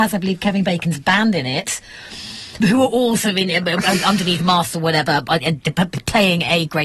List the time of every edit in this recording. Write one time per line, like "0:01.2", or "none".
0:02.6